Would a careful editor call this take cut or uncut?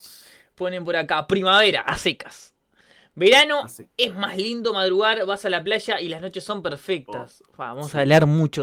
uncut